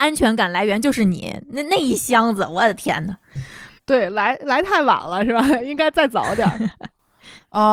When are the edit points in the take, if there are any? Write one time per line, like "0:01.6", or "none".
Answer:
0:03.8